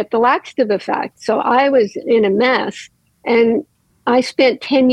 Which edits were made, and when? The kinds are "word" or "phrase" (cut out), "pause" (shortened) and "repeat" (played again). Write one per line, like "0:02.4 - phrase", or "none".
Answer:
none

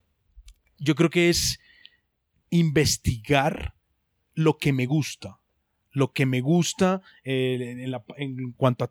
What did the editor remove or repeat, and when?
none

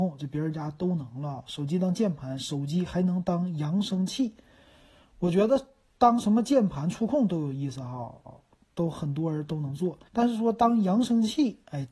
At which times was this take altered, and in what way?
0:08.3 - repeat
0:10.1 - pause

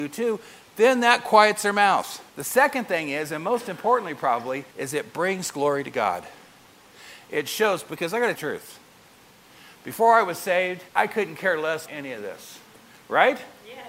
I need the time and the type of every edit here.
0:02.3 - pause
0:04.7 - pause
0:08.4 - phrase
0:10.9 - pause
0:11.9 - word

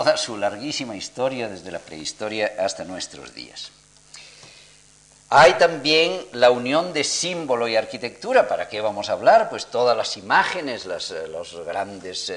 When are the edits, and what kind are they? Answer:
none

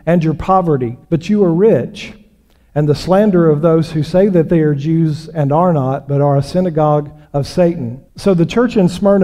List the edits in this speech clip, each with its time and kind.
0:01.0 - pause
0:07.2 - pause
0:08.1 - pause

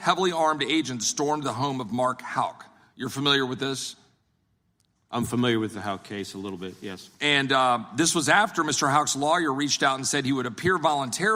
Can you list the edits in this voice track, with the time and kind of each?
none

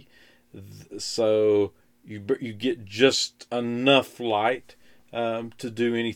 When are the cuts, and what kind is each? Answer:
none

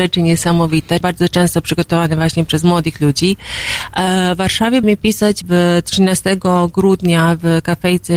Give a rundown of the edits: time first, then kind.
0:01.0 - word
0:04.8 - word
0:05.4 - word

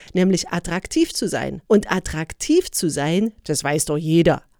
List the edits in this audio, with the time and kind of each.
0:01.7 - pause

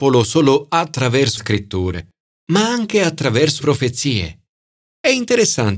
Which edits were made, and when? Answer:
0:01.4 - word
0:03.6 - word

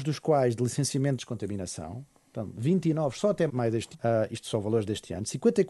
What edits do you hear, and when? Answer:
0:01.2 - phrase
0:03.5 - word
0:03.9 - word

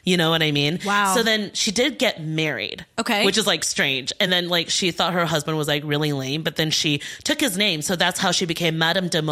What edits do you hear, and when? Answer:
none

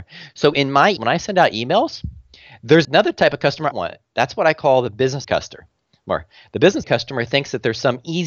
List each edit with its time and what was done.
0:01.0 - word
0:02.8 - word
0:03.7 - phrase
0:05.2 - word
0:06.8 - word

